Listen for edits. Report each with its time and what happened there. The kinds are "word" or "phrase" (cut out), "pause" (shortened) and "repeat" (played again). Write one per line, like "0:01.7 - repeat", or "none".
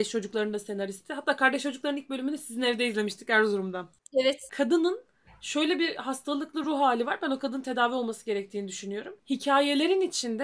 none